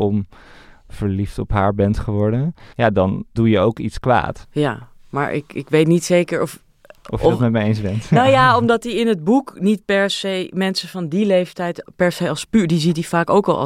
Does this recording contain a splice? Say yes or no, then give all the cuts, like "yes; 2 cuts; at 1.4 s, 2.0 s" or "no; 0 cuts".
yes; 1 cut; at 2.7 s